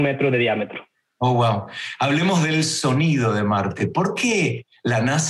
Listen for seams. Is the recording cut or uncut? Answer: uncut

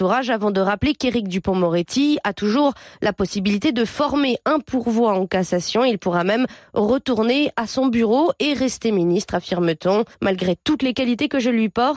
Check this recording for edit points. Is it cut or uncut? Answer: cut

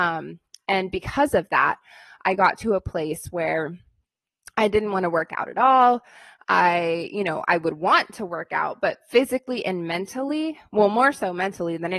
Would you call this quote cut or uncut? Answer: uncut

